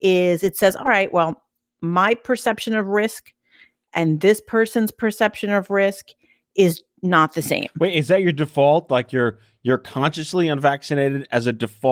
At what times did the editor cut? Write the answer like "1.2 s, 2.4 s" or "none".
none